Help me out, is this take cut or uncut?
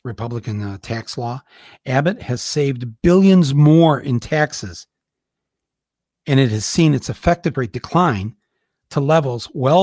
cut